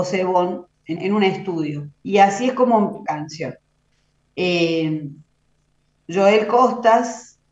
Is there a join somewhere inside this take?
yes; 3 cuts; at 1.0 s, 1.9 s, 3.1 s

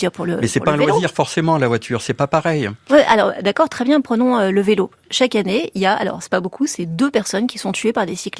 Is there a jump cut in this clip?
no; 0 cuts

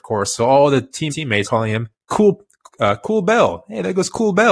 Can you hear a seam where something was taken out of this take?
yes; 2 cuts; at 1.1 s, 1.4 s

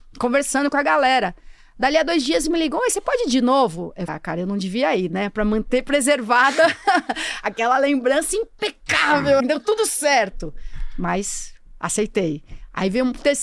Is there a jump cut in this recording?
yes; 3 cuts; at 2.4 s, 4.1 s, 9.4 s

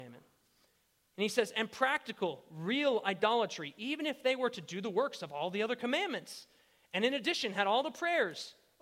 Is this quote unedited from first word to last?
yes; 0 cuts

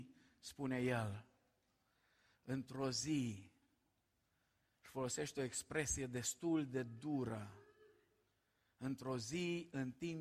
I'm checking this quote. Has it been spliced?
no; 0 cuts

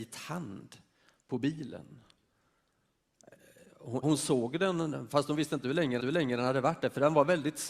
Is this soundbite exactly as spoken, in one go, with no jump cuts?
no; 2 cuts; at 4.0 s, 6.0 s

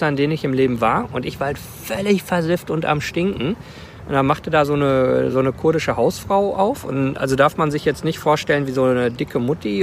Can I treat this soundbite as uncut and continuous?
yes; 0 cuts

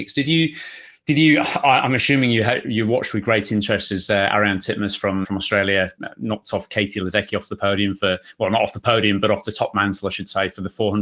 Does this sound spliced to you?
yes; 1 cut; at 5.2 s

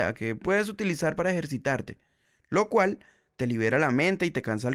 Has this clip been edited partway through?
no; 0 cuts

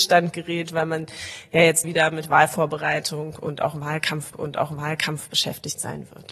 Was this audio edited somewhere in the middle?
yes; 2 cuts; at 1.8 s, 4.3 s

